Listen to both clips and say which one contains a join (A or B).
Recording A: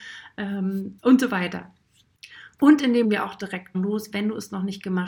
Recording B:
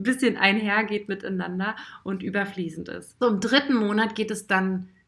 A